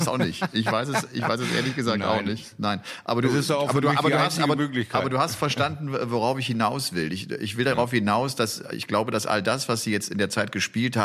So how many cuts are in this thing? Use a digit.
0